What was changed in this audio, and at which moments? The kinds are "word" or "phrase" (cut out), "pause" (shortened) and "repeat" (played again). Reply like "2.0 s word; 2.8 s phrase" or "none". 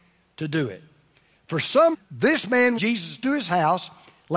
1.9 s word; 2.8 s word; 3.2 s word